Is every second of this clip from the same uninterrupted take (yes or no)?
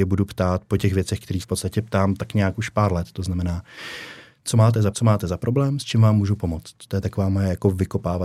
no